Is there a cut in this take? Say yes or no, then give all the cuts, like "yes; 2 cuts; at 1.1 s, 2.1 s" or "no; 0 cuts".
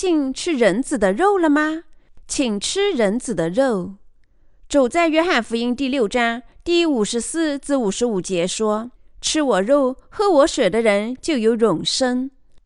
yes; 1 cut; at 8.9 s